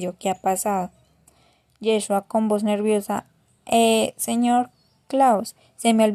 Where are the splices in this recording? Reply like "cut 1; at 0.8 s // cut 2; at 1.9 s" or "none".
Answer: none